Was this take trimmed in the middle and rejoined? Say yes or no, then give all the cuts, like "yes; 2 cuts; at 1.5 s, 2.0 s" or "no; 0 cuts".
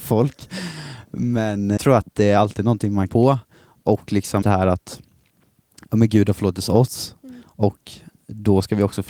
yes; 3 cuts; at 1.8 s, 3.1 s, 4.4 s